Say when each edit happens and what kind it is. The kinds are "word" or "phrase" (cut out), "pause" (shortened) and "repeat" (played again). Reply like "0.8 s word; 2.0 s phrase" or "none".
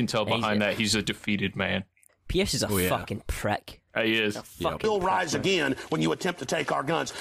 2.1 s pause